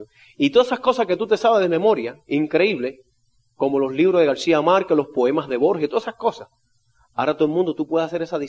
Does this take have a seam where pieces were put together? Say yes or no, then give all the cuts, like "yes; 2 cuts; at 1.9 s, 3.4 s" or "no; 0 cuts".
no; 0 cuts